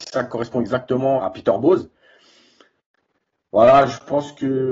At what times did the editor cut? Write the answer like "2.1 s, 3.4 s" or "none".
1.2 s

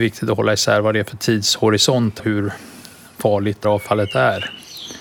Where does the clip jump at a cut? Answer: 2.2 s, 3.6 s

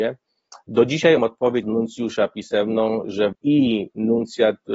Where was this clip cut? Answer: 1.2 s, 1.6 s, 3.3 s

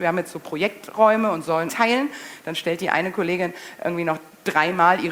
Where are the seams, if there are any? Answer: 1.7 s

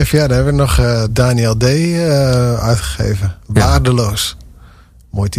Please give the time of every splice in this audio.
1.1 s

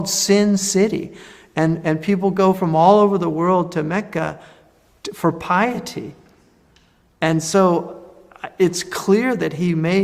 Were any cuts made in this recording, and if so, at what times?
none

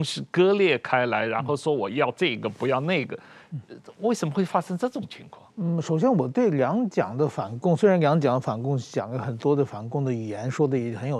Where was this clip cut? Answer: 5.5 s

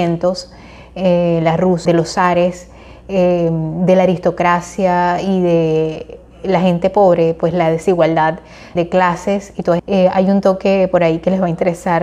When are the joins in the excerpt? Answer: 1.9 s, 8.8 s, 9.8 s

